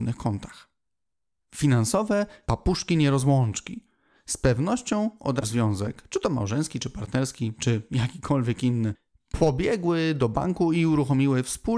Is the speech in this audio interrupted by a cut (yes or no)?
yes